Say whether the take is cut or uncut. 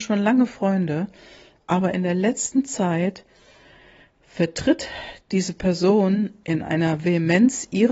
uncut